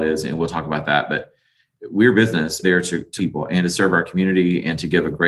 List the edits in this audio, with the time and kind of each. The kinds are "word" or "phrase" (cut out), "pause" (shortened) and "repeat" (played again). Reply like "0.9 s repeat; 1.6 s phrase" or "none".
2.6 s phrase; 3.2 s word